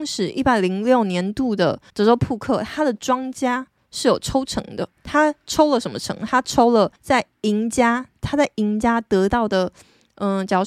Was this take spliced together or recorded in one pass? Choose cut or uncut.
cut